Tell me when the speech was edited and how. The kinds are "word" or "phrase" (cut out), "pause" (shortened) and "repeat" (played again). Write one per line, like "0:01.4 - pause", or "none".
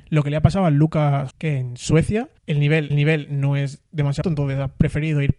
0:01.3 - word
0:02.4 - pause
0:02.9 - repeat
0:04.2 - word